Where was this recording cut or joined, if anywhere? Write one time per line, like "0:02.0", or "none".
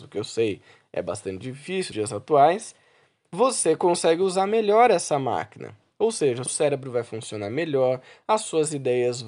0:01.9
0:06.5